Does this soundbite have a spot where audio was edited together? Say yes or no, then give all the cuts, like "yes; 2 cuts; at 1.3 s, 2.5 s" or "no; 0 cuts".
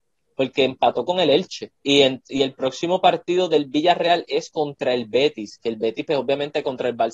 yes; 1 cut; at 1.7 s